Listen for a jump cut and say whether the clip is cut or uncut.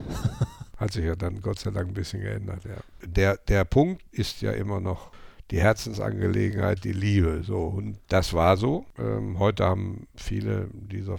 cut